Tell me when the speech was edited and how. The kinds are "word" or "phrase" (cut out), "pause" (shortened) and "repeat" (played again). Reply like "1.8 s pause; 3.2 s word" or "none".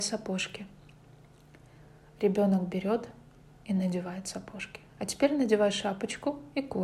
4.9 s pause

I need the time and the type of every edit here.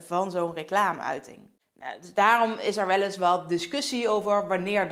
none

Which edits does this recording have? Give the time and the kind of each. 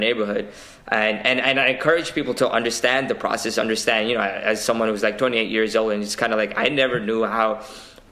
none

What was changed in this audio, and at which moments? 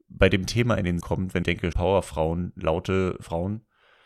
1.0 s word; 1.4 s phrase; 1.7 s word

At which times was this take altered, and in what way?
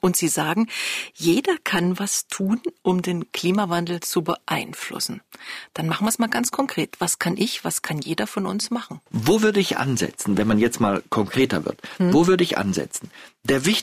none

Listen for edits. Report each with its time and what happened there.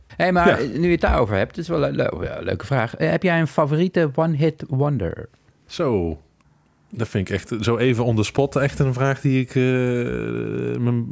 none

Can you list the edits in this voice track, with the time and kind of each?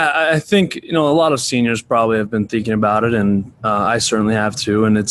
none

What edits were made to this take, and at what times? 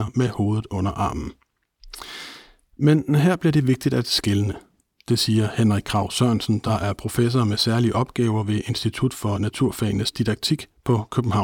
none

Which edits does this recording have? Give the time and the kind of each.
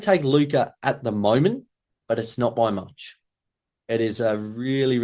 1.9 s pause

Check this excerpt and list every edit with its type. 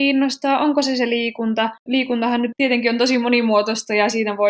1.8 s pause; 2.5 s word

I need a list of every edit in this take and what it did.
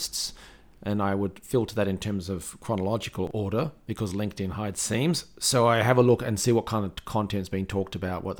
4.7 s phrase

